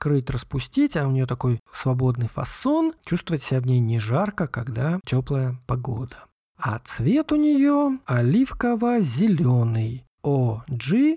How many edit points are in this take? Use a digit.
3